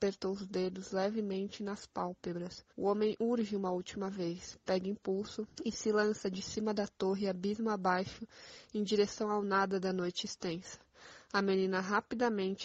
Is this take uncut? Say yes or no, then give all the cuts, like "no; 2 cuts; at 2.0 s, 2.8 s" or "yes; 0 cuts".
no; 2 cuts; at 2.7 s, 5.5 s